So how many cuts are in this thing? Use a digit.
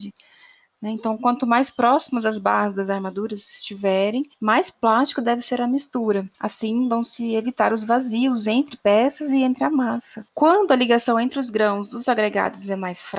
3